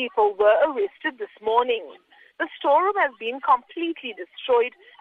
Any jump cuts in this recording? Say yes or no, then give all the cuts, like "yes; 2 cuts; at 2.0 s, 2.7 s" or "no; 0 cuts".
no; 0 cuts